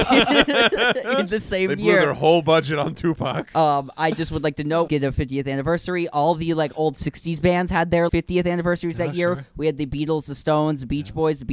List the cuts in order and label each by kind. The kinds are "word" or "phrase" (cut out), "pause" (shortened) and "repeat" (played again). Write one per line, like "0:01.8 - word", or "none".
0:04.9 - phrase
0:08.1 - word

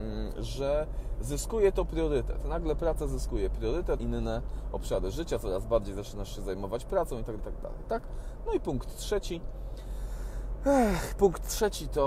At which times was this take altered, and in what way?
0:04.0 - word
0:07.4 - word

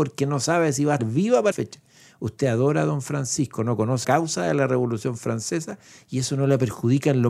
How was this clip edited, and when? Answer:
0:01.0 - word
0:01.5 - word
0:04.0 - word

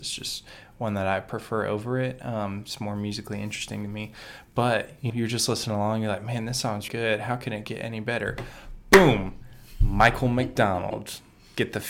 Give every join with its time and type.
0:05.1 - word
0:06.9 - word

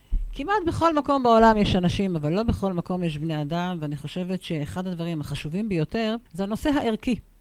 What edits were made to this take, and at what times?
0:06.3 - pause

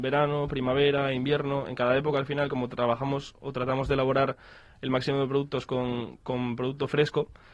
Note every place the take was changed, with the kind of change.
none

